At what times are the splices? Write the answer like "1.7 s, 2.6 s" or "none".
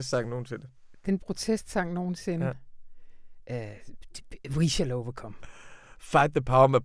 1.2 s

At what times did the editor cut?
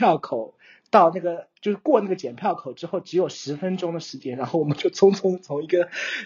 1.6 s

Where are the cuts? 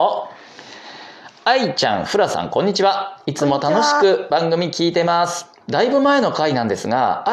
5.6 s

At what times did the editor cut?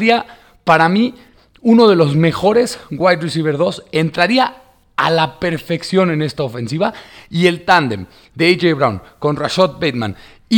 none

